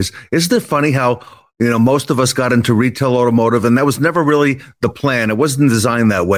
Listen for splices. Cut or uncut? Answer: uncut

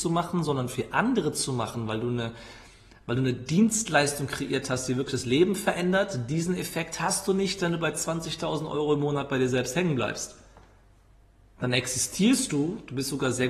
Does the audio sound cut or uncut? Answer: uncut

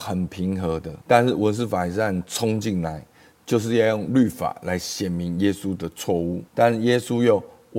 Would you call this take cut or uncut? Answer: cut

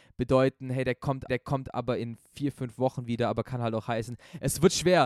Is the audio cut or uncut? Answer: cut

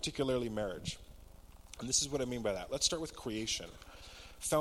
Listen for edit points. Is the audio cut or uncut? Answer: uncut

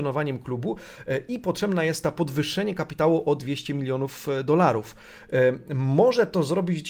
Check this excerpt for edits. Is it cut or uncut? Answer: uncut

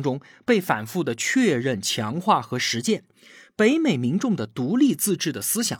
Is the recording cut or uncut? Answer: uncut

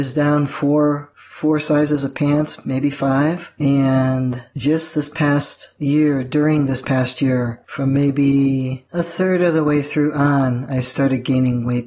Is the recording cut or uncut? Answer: uncut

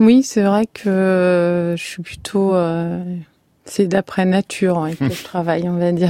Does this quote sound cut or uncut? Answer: uncut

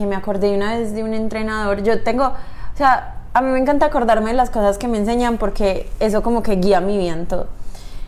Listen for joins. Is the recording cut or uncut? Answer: uncut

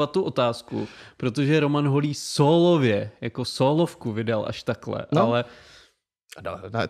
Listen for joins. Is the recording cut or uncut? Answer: uncut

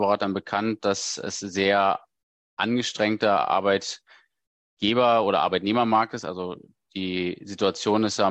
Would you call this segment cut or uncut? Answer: uncut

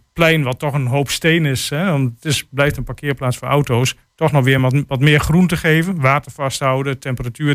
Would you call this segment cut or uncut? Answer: uncut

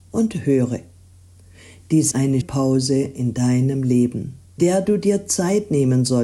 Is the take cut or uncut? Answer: cut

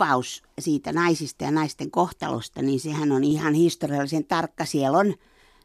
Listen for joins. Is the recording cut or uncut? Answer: uncut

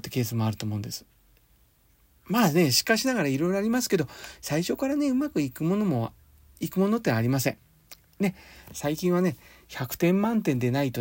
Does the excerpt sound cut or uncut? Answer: uncut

